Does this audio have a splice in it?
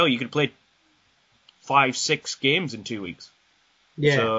no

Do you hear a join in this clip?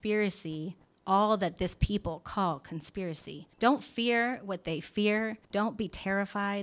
yes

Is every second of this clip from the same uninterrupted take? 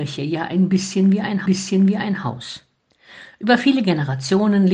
no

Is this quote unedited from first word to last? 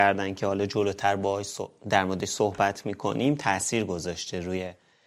yes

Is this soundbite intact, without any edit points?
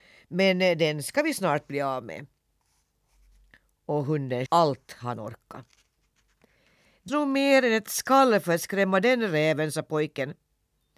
no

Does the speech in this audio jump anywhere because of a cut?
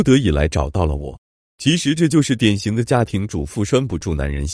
no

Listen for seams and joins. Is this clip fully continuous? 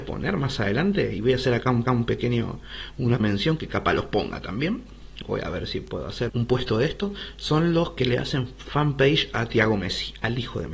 no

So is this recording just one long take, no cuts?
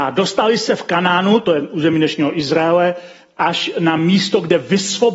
yes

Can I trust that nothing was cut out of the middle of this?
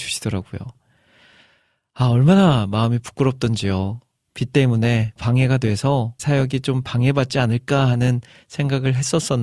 no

